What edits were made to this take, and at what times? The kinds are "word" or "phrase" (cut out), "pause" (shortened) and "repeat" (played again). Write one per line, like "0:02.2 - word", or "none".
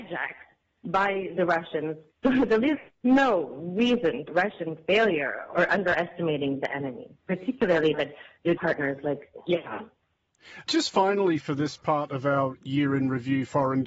0:02.1 - pause
0:04.3 - phrase
0:07.9 - word
0:08.6 - phrase